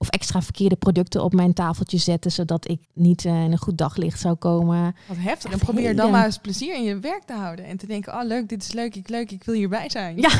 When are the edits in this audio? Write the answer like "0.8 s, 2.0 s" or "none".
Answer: 2.8 s, 9.1 s